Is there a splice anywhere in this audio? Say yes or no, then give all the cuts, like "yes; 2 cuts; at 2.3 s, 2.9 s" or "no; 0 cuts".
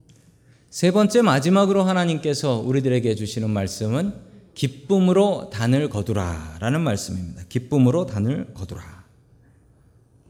no; 0 cuts